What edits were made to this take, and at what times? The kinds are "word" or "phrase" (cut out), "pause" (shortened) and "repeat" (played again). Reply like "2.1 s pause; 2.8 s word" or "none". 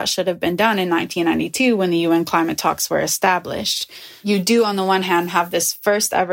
none